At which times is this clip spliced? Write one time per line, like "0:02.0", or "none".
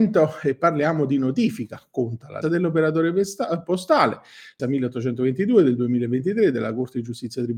0:02.4
0:04.6